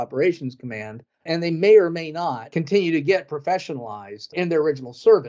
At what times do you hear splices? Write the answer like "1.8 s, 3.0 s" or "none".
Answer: 1.1 s